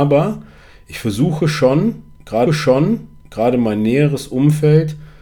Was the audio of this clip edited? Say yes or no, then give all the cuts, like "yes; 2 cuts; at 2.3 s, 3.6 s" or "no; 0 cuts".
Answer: yes; 1 cut; at 2.5 s